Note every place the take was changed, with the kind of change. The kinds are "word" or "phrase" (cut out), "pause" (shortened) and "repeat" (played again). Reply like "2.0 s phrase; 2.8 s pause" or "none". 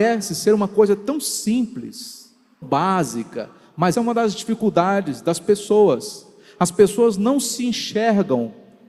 2.6 s word; 3.9 s word